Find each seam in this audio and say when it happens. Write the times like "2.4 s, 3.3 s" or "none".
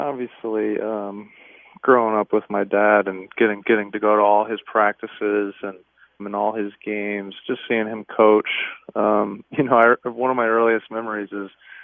3.6 s, 6.2 s